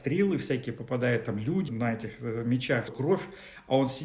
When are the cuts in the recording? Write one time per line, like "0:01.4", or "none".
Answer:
0:01.7
0:02.9